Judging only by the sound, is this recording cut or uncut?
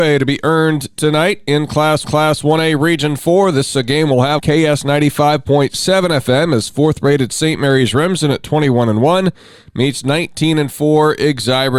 cut